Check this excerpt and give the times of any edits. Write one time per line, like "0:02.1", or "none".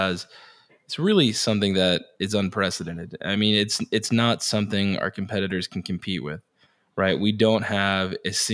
none